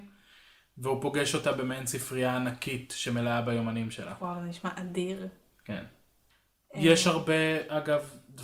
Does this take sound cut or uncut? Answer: uncut